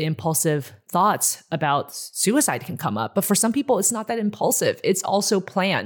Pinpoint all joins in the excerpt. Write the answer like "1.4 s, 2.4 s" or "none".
none